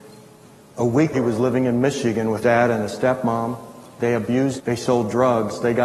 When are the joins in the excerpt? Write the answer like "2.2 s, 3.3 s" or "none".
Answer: 1.1 s, 2.4 s, 4.6 s

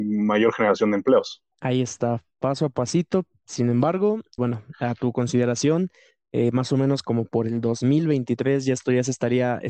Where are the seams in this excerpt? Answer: 1.5 s

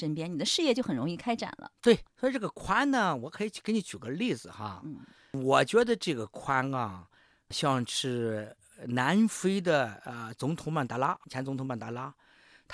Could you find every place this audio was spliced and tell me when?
none

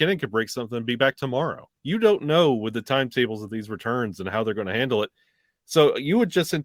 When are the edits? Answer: 1.8 s

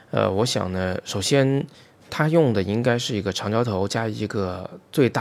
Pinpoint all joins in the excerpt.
none

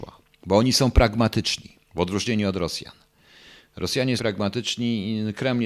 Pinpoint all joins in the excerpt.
1.8 s, 4.2 s

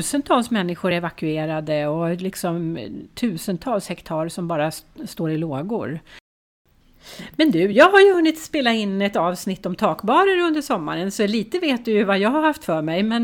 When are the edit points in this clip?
none

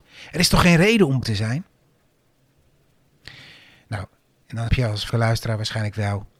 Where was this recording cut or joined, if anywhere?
1.2 s, 4.7 s, 5.1 s

